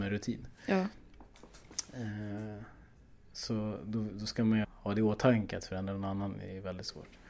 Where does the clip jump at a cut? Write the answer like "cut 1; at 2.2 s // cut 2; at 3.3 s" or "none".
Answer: cut 1; at 4.6 s